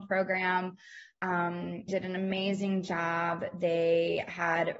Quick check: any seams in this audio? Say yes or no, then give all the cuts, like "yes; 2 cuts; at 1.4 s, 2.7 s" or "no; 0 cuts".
yes; 1 cut; at 1.9 s